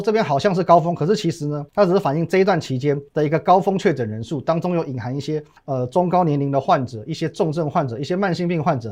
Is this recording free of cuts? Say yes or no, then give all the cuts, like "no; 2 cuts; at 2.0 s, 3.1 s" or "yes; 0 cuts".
no; 3 cuts; at 1.7 s, 3.1 s, 5.6 s